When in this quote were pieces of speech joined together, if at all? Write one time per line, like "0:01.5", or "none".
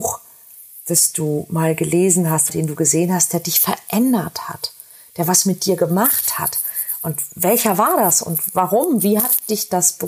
0:02.5